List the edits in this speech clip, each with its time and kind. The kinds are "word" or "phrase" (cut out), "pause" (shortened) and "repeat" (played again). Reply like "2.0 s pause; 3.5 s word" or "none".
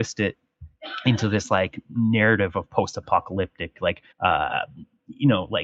4.1 s pause